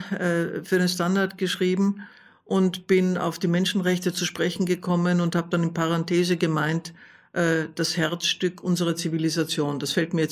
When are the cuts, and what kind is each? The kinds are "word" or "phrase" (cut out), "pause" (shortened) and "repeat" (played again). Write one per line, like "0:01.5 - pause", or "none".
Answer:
none